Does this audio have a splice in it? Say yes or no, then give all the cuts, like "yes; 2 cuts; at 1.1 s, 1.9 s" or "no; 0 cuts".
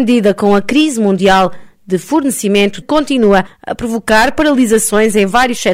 yes; 1 cut; at 2.8 s